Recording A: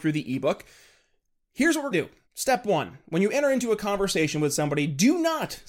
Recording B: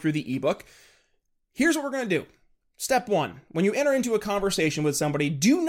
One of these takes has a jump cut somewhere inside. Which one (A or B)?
A